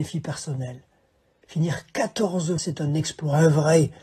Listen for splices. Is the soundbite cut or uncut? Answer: cut